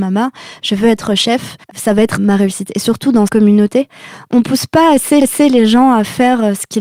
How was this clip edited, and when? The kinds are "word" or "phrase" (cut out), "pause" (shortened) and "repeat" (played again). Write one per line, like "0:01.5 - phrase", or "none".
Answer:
0:01.6 - pause
0:02.2 - word
0:03.3 - word
0:05.2 - repeat